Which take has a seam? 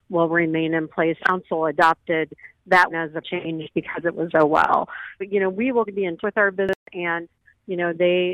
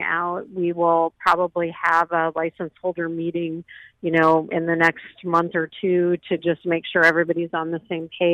first; 7 cuts; at 1.2 s, 2.9 s, 3.2 s, 4.3 s, 5.2 s, 5.8 s, 6.2 s

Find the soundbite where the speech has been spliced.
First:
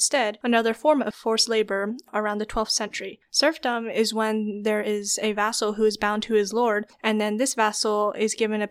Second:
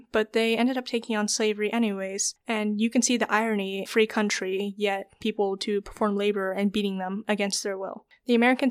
second; 2 cuts; at 3.9 s, 5.2 s

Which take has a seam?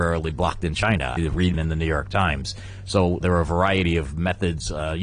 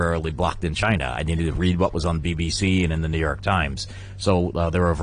first; 3 cuts; at 1.2 s, 1.5 s, 3.2 s

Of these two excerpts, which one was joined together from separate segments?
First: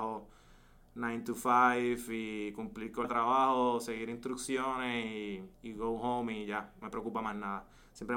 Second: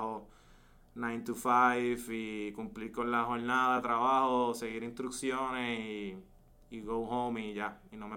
first; 3 cuts; at 3.0 s, 5.5 s, 6.8 s

